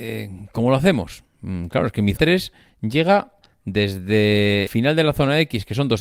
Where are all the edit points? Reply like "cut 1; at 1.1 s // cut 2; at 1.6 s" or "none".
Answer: cut 1; at 2.2 s // cut 2; at 4.7 s